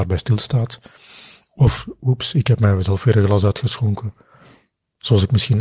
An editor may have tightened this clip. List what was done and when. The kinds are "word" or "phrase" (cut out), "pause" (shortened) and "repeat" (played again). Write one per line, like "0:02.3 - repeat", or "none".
none